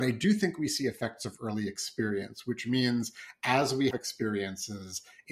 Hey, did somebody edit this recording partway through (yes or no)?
yes